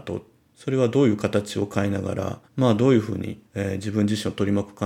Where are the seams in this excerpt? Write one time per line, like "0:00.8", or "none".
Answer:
0:02.5
0:03.4